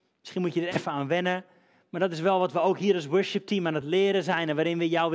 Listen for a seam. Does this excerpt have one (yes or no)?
no